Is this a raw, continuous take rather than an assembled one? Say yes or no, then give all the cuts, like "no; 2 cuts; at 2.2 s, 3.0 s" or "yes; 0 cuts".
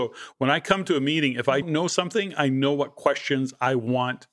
no; 1 cut; at 1.6 s